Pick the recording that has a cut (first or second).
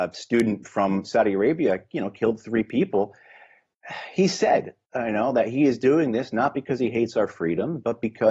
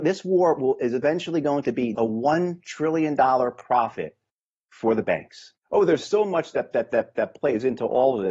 second